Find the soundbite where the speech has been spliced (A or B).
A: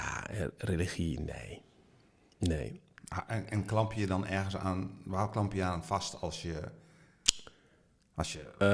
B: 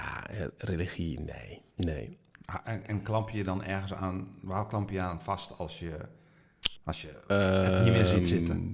B